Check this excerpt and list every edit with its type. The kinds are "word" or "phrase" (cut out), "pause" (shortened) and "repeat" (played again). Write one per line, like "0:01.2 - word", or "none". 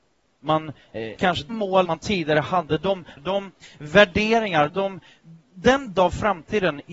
0:01.1 - word
0:01.5 - word
0:01.8 - word
0:03.2 - word
0:04.7 - word
0:05.9 - word

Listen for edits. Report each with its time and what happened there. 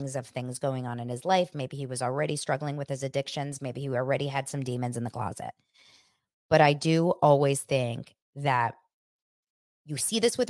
none

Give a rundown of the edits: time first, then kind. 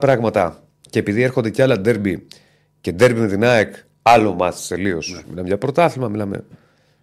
none

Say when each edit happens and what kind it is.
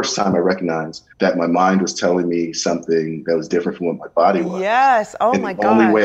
0:01.1 - pause

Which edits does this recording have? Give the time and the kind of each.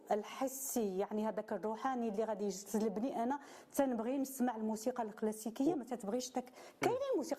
none

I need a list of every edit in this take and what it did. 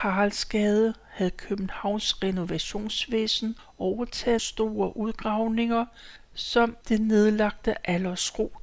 0:04.4 - word

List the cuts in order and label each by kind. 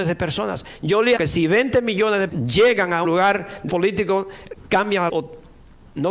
0:01.2 - word
0:02.3 - word
0:03.0 - word
0:03.7 - word
0:05.1 - word

